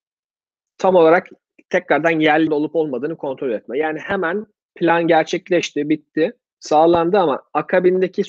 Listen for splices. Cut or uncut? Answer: cut